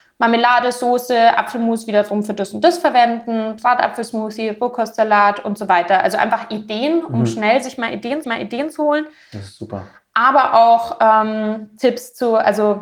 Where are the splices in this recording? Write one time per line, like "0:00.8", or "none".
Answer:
0:08.2